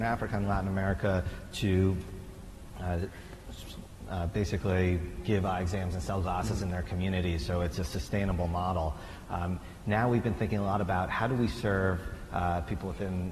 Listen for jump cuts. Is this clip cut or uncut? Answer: uncut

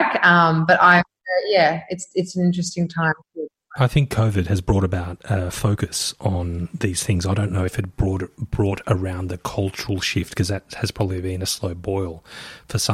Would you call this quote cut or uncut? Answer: uncut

